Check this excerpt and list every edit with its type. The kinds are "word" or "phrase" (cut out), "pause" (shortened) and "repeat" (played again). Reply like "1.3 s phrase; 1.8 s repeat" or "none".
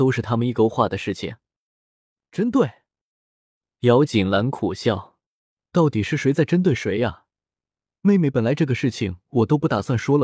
none